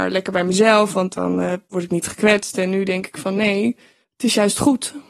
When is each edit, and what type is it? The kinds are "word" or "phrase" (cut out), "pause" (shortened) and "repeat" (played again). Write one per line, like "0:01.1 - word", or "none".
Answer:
0:01.6 - pause
0:04.0 - pause